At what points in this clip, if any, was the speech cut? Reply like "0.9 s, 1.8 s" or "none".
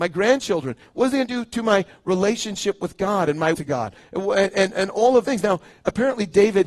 3.5 s, 5.2 s